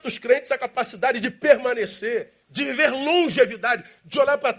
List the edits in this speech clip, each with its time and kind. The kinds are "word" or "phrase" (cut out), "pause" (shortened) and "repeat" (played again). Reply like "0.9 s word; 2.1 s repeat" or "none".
2.4 s pause